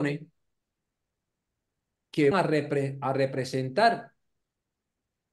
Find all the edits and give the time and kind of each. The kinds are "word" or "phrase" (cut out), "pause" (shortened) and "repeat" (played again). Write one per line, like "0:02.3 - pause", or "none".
0:02.3 - word